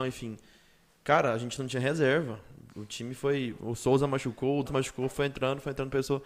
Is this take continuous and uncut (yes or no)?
no